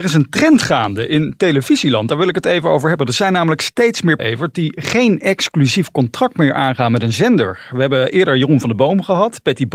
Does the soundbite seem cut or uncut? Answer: cut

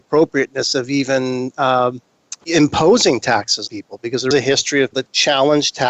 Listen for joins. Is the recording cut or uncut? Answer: cut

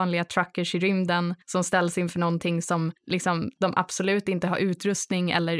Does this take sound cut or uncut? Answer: cut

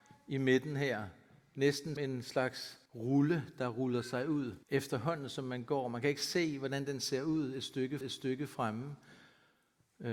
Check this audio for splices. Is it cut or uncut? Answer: cut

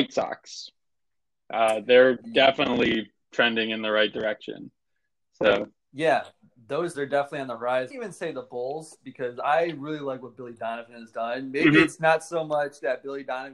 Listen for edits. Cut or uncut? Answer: cut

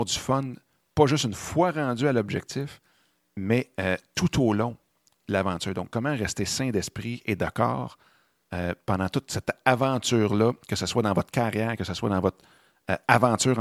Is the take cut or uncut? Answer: uncut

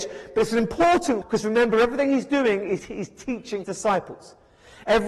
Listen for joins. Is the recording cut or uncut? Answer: cut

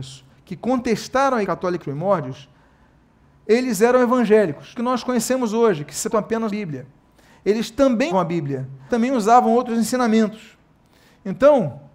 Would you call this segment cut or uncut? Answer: cut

